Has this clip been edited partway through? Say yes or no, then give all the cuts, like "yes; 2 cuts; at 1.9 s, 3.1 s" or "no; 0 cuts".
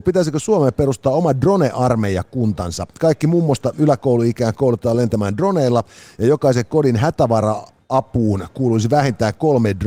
no; 0 cuts